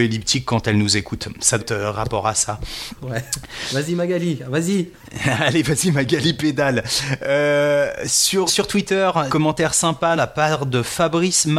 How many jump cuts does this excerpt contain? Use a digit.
4